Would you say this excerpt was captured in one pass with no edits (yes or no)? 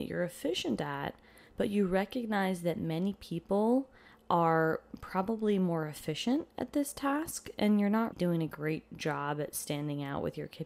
no